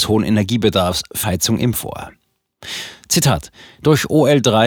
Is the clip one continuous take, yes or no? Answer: no